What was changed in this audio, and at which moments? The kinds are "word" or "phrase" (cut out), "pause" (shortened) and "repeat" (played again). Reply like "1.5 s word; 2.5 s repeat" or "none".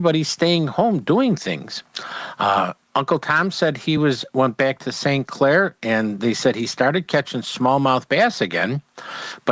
none